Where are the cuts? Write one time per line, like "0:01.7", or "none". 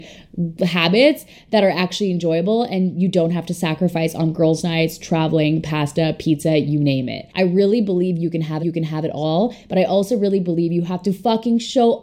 0:07.3
0:08.6